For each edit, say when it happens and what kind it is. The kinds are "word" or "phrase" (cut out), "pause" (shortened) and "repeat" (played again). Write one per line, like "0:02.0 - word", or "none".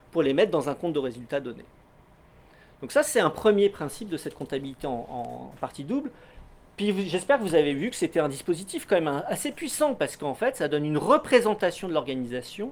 none